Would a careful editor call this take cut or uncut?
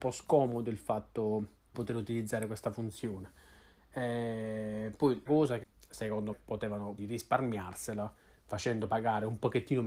cut